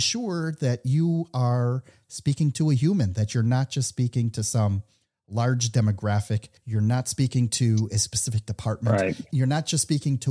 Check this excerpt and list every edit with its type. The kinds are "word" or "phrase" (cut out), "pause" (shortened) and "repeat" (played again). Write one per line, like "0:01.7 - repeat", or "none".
0:06.6 - pause